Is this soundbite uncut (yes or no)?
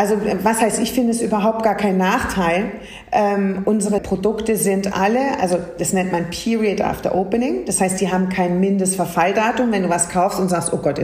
no